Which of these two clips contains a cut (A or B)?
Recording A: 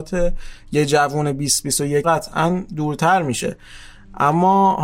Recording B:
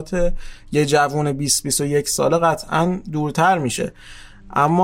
A